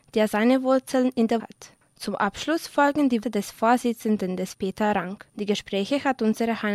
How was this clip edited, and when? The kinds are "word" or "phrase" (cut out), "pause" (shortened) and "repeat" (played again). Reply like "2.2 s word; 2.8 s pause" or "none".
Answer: 1.4 s word; 1.8 s pause; 3.2 s word; 4.5 s word; 5.3 s pause

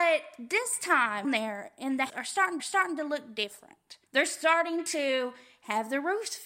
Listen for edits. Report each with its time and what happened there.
1.2 s phrase; 2.1 s word; 2.6 s repeat; 4.1 s pause

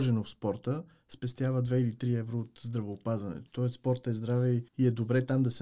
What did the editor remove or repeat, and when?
4.7 s pause

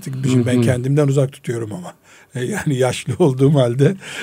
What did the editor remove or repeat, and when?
none

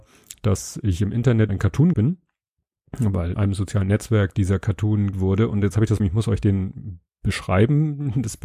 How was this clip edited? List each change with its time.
1.5 s word; 1.9 s word; 3.3 s word; 5.1 s word; 6.0 s word

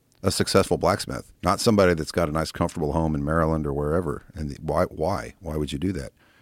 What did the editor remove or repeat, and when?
1.3 s pause

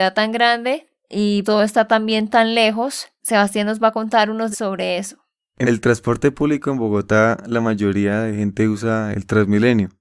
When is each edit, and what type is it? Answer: 1.4 s word; 3.2 s word; 4.5 s word; 5.6 s word

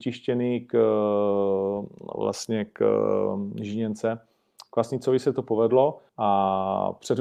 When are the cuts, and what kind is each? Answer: 6.1 s pause

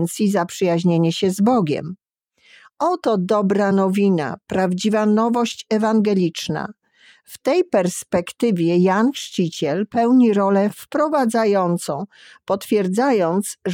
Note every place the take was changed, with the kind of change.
none

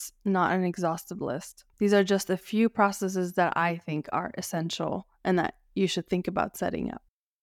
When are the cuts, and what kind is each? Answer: 1.7 s pause

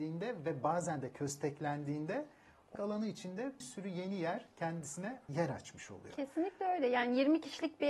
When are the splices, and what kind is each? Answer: 2.7 s word; 3.6 s word; 5.3 s word

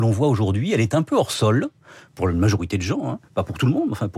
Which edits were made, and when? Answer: none

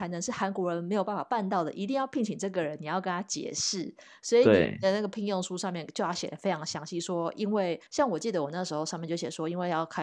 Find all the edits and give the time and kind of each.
7.9 s pause

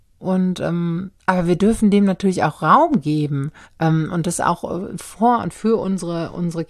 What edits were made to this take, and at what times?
1.2 s pause; 3.6 s pause

